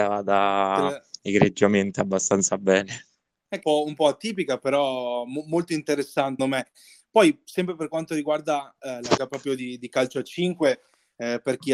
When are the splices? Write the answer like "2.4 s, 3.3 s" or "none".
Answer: 3.6 s, 6.4 s, 9.2 s